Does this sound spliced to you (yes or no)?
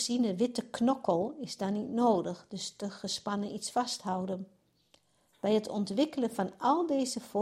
no